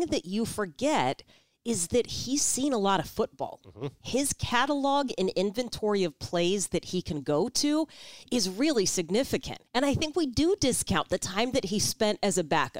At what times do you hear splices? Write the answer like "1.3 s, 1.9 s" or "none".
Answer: 9.7 s